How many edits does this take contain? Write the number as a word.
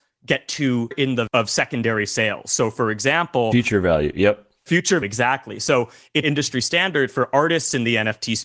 four